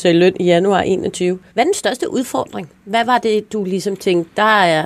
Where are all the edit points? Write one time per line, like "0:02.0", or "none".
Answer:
0:01.5